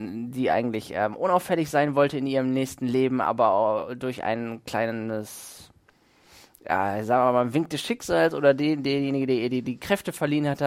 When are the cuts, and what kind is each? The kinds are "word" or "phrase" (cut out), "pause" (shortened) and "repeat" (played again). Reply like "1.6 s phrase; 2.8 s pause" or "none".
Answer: none

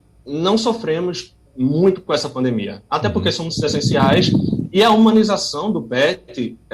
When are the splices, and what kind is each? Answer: 3.6 s word

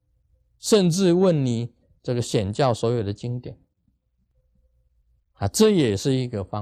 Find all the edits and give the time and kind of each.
none

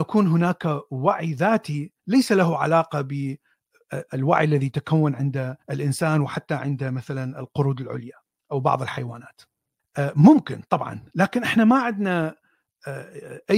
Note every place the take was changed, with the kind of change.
2.0 s pause; 5.6 s pause; 8.3 s pause; 9.8 s pause

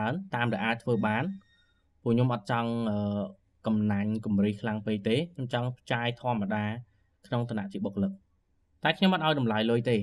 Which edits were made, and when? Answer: none

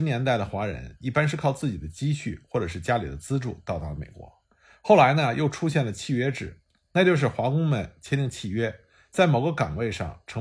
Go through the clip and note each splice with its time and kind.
none

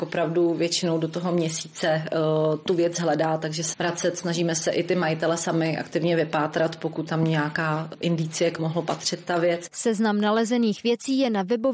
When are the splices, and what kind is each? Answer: 3.7 s phrase; 7.1 s word; 8.6 s phrase

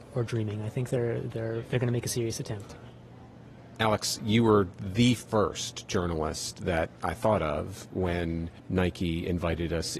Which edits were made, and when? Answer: 8.6 s pause

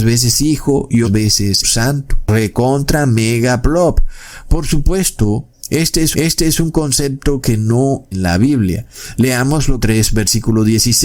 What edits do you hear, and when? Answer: 1.0 s word; 1.6 s word; 6.1 s repeat; 8.1 s word; 9.8 s phrase

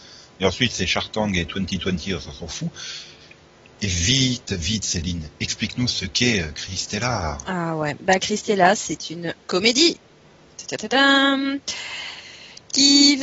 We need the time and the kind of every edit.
none

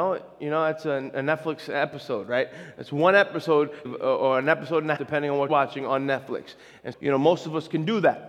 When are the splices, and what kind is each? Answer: 3.9 s word; 5.0 s word; 5.5 s word; 6.9 s word

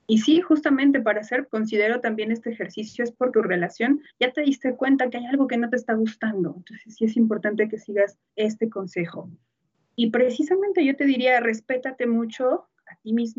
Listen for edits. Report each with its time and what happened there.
1.5 s word; 3.3 s word; 4.1 s pause; 8.3 s pause

